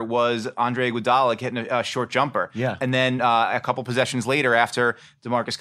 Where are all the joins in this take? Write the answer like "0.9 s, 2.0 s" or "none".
none